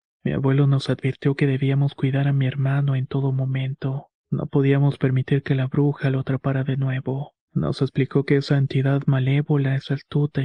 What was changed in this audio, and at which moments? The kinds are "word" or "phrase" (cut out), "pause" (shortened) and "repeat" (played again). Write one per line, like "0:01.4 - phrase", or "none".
0:04.2 - pause
0:07.4 - pause